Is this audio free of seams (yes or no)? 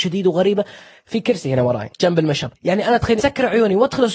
yes